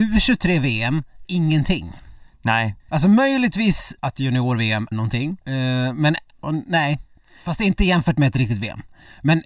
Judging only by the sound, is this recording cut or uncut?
cut